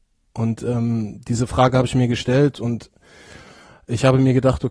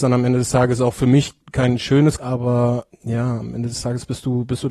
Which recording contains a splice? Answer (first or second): second